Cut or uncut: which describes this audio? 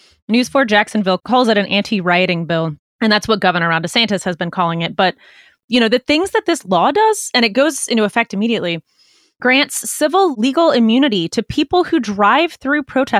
uncut